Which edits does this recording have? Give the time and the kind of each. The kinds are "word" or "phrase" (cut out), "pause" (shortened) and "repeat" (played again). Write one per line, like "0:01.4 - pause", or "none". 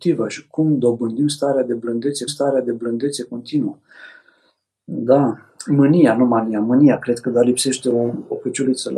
0:02.3 - repeat